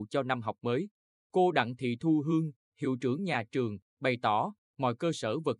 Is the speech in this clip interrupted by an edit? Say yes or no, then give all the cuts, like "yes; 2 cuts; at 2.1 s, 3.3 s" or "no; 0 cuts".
no; 0 cuts